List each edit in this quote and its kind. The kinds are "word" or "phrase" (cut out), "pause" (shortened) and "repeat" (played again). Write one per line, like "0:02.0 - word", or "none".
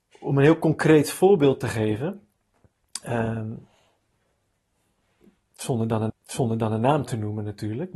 0:06.1 - repeat